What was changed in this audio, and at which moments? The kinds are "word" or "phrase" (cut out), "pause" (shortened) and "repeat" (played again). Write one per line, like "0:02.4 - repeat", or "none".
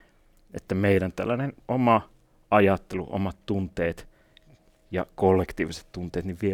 0:01.6 - pause